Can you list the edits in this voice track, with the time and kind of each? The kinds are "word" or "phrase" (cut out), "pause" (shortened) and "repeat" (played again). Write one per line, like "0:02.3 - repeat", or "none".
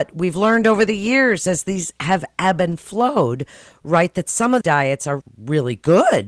0:04.6 - word
0:05.2 - word